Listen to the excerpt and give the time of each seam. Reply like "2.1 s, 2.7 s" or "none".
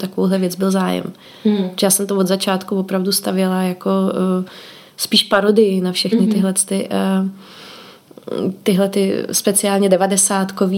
none